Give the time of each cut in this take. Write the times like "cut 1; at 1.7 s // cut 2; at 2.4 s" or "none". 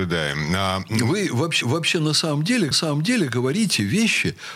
cut 1; at 1.6 s // cut 2; at 2.7 s

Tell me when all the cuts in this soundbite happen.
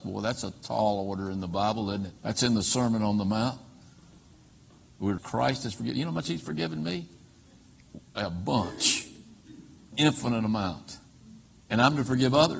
cut 1; at 2.2 s // cut 2; at 5.2 s // cut 3; at 9.9 s

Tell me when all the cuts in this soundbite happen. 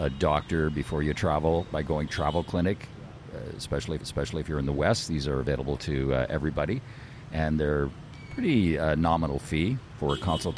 cut 1; at 1.6 s // cut 2; at 2.1 s // cut 3; at 4.0 s

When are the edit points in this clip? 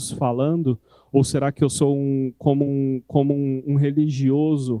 cut 1; at 2.7 s

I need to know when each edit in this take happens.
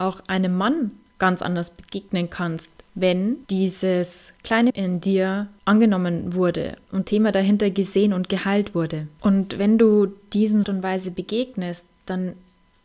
cut 1; at 3.5 s // cut 2; at 4.7 s // cut 3; at 7.0 s // cut 4; at 10.6 s

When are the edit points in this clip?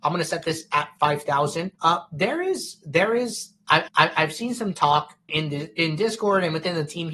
cut 1; at 1.8 s // cut 2; at 3.9 s // cut 3; at 5.3 s

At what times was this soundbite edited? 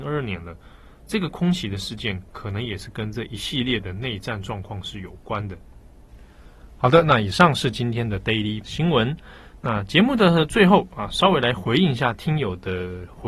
cut 1; at 8.6 s

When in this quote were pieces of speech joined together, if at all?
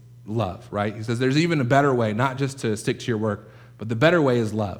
none

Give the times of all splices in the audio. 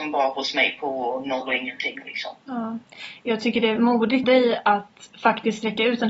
cut 1; at 3.8 s // cut 2; at 4.2 s

